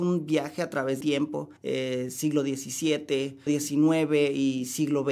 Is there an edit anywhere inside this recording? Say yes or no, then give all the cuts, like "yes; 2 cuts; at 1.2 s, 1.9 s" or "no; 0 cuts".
yes; 3 cuts; at 1.0 s, 1.6 s, 3.5 s